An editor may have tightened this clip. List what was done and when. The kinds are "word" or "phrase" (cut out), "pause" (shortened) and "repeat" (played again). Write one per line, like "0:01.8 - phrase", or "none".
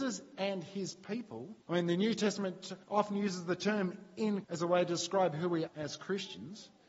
0:01.6 - pause
0:02.8 - pause
0:04.4 - word
0:05.7 - word